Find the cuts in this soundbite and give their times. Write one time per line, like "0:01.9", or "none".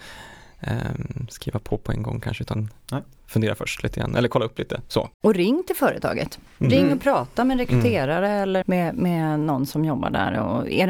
0:05.1
0:08.6